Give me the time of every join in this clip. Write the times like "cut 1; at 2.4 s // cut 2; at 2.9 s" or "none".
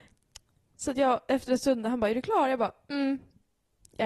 none